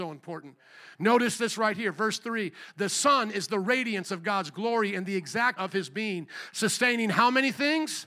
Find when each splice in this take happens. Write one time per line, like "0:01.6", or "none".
0:05.6